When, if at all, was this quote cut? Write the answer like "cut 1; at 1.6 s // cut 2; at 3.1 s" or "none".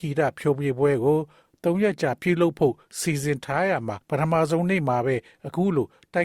cut 1; at 4.0 s